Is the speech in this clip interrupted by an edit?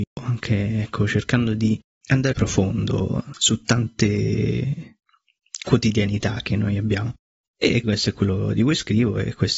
yes; 2 cuts; at 2.3 s, 7.8 s

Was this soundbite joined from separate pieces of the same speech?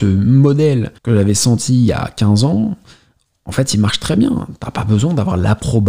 yes; 1 cut; at 1.0 s

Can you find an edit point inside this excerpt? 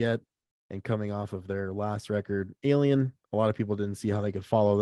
yes; 1 cut; at 3.2 s

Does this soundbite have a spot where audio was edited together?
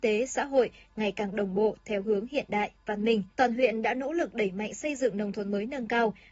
yes; 1 cut; at 3.3 s

